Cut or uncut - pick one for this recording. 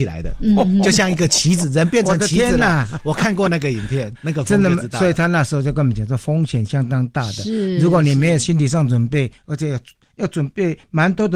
cut